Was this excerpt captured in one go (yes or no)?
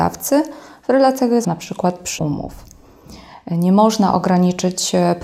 no